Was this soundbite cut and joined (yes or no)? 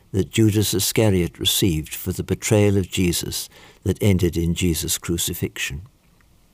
no